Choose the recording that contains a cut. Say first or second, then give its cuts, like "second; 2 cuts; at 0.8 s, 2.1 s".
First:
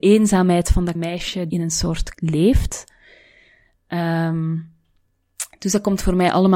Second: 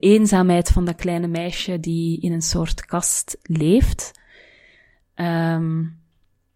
first; 3 cuts; at 0.9 s, 1.5 s, 2.1 s